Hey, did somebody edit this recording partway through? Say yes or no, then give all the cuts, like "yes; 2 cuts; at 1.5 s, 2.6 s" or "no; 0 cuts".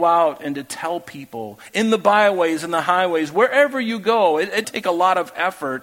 yes; 1 cut; at 4.6 s